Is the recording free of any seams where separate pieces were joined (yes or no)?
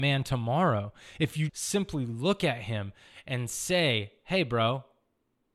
no